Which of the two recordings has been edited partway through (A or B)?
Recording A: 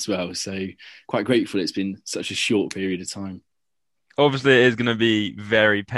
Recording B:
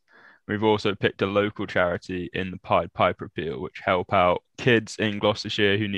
B